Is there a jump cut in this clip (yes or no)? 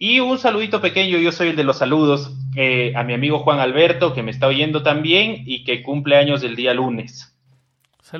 no